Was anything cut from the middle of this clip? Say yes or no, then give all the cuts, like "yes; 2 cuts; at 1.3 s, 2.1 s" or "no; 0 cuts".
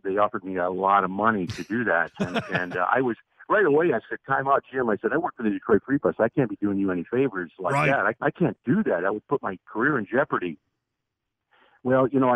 yes; 1 cut; at 8.1 s